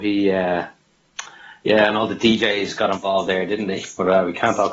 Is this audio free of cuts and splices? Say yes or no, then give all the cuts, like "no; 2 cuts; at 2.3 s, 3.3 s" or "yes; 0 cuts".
yes; 0 cuts